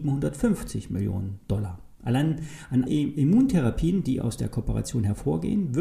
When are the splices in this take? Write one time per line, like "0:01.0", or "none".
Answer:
0:02.9

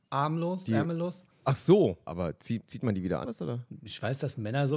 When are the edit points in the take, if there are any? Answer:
0:01.3
0:02.1
0:03.2

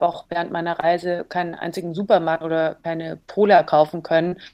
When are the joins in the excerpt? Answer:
0:02.4

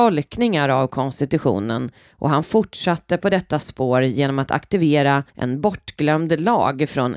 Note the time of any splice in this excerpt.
0:05.3

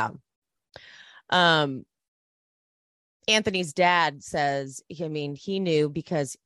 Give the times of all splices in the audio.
none

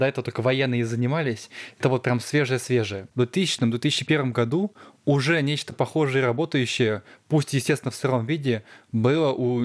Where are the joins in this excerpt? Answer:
none

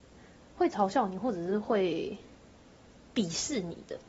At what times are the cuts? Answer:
none

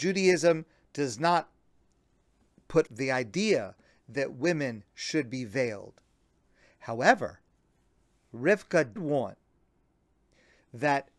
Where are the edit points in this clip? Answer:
0:02.9
0:09.0

